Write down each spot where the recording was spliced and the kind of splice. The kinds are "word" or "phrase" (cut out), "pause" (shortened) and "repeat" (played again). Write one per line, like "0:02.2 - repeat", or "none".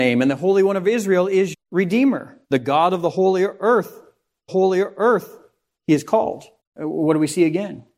0:01.5 - word
0:02.4 - pause
0:04.5 - repeat
0:06.6 - pause